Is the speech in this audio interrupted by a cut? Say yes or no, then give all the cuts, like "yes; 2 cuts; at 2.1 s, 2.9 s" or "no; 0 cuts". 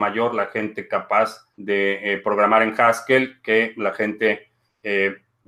yes; 1 cut; at 1.5 s